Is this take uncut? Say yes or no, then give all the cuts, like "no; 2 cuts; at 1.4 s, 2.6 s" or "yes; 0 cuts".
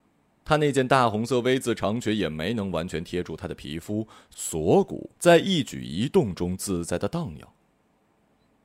no; 1 cut; at 5.1 s